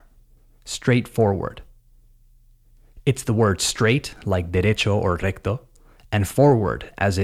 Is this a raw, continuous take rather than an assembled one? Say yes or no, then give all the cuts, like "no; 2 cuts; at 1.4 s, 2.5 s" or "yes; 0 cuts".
yes; 0 cuts